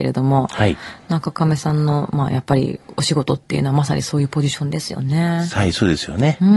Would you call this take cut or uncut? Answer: uncut